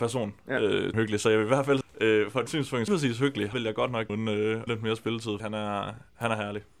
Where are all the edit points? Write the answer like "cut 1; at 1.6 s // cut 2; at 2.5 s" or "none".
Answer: cut 1; at 0.9 s // cut 2; at 1.8 s // cut 3; at 2.5 s // cut 4; at 2.9 s // cut 5; at 3.5 s // cut 6; at 4.1 s // cut 7; at 4.7 s // cut 8; at 5.4 s